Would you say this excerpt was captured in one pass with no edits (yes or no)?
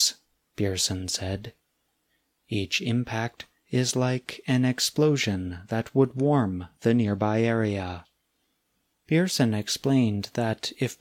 yes